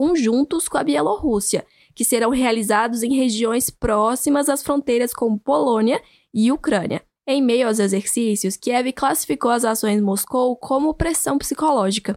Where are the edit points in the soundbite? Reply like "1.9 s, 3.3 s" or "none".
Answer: none

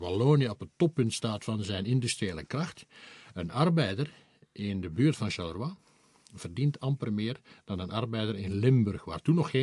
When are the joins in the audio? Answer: none

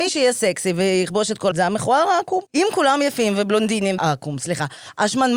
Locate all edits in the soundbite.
1.5 s, 2.5 s, 4.0 s

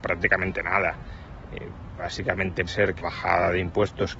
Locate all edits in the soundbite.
2.7 s, 3.0 s

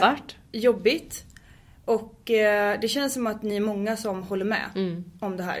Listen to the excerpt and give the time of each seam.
none

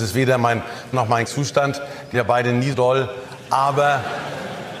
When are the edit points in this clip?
0.9 s, 1.3 s, 2.1 s, 2.7 s

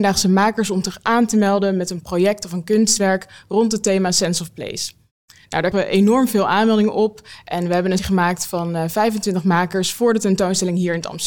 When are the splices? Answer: 5.7 s, 8.0 s

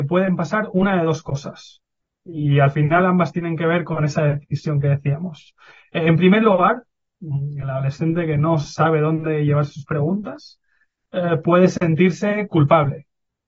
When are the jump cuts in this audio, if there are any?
none

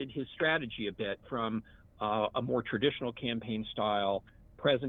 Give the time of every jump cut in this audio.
none

